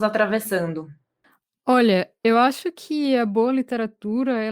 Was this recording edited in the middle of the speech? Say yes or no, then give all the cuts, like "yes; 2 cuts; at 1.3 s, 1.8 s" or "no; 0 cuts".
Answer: no; 0 cuts